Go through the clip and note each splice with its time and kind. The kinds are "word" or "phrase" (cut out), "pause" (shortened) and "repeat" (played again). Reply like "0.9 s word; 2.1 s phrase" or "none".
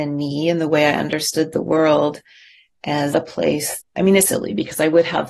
3.1 s word; 3.8 s word; 4.3 s word